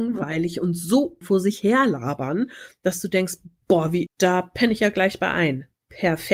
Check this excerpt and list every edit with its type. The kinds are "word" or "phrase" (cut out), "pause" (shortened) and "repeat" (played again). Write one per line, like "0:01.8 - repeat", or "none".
0:01.2 - word
0:04.1 - word